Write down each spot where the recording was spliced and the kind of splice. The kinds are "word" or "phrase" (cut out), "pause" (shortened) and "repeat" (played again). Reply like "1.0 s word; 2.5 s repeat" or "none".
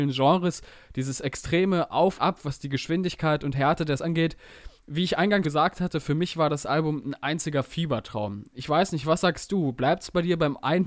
2.2 s word; 4.0 s word; 5.4 s word